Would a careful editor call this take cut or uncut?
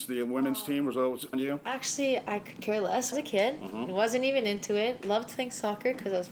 cut